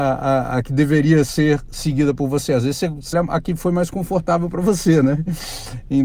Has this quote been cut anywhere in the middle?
yes; 1 cut; at 3.1 s

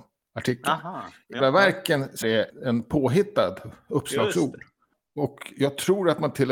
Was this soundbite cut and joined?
yes; 2 cuts; at 1.4 s, 2.2 s

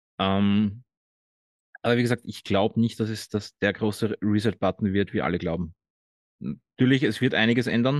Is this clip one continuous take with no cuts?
yes; 0 cuts

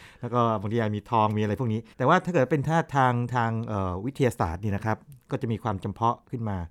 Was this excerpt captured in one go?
no; 1 cut; at 1.9 s

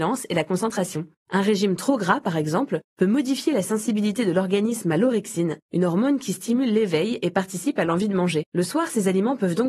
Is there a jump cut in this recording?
yes; 1 cut; at 8.5 s

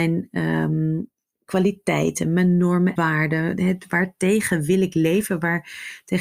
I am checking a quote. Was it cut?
yes; 1 cut; at 3.0 s

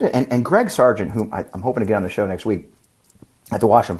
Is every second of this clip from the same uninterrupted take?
yes; 0 cuts

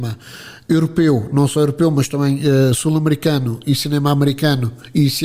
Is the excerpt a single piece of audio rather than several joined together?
yes; 0 cuts

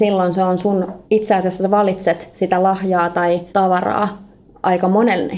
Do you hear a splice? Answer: yes; 2 cuts; at 1.1 s, 3.5 s

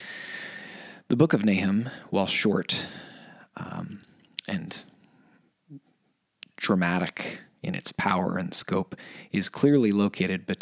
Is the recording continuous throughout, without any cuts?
yes; 0 cuts

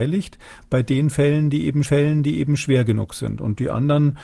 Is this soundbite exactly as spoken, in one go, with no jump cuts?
no; 1 cut; at 1.8 s

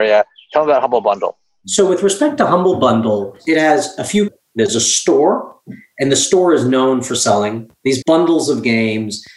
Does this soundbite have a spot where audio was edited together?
yes; 2 cuts; at 4.3 s, 8.0 s

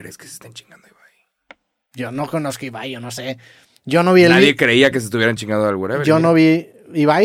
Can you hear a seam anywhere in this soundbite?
no; 0 cuts

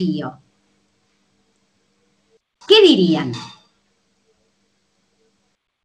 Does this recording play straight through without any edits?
yes; 0 cuts

